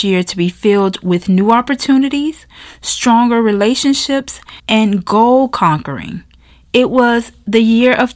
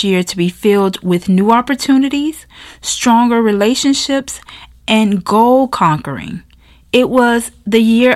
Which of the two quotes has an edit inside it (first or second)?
first